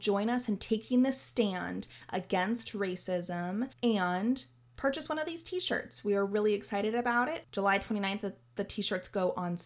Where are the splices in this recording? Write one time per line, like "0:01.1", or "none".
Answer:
0:03.7

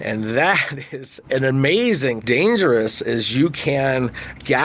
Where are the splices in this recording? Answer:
0:01.2
0:02.2

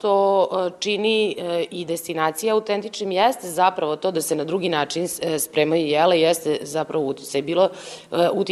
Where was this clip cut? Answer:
none

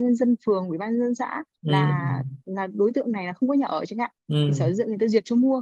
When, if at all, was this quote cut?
0:01.5
0:04.2

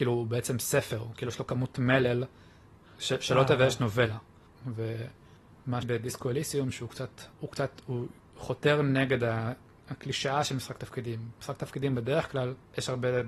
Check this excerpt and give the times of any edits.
0:05.8
0:07.3

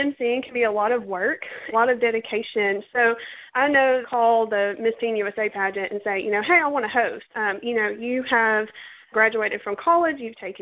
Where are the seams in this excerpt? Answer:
0:01.7
0:03.5
0:04.0
0:07.3
0:09.1

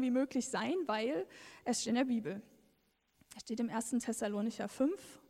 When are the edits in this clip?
0:01.8

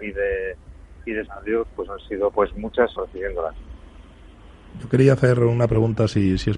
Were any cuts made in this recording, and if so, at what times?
0:01.3
0:02.3
0:03.0

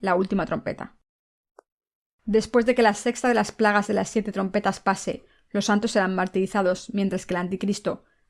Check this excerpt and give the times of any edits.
none

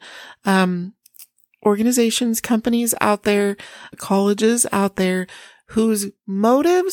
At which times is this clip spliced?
none

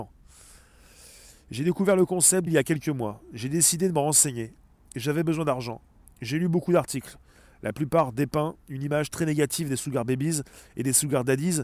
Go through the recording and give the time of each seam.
0:02.5

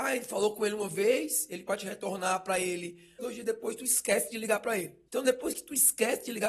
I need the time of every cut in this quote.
0:01.7
0:03.2
0:05.1

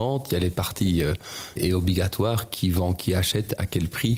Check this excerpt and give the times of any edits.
0:01.6

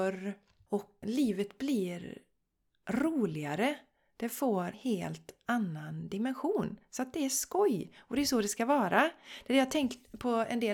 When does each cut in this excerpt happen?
0:01.0
0:04.7

